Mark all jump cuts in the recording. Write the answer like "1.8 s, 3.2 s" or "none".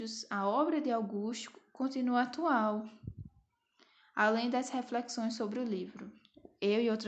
none